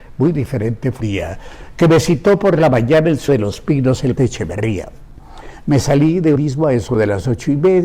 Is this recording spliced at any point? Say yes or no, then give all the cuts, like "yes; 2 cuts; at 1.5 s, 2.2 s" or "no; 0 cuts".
yes; 4 cuts; at 1.0 s, 3.3 s, 4.2 s, 6.4 s